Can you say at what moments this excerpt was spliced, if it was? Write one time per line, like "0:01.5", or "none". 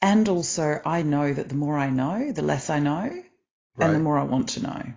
none